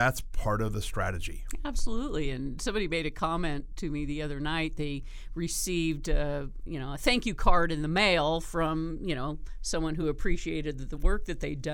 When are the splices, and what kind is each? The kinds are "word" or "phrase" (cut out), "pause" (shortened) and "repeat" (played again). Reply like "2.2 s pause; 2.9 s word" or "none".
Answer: none